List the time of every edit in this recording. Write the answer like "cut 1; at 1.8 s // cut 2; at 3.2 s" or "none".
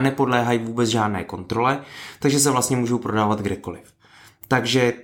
none